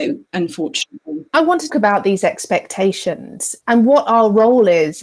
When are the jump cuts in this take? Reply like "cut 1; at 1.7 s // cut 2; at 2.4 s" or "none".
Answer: cut 1; at 1.7 s